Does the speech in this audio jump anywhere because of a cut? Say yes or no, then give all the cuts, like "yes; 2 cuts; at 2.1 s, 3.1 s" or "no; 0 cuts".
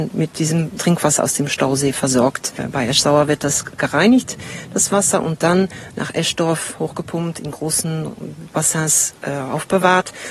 no; 0 cuts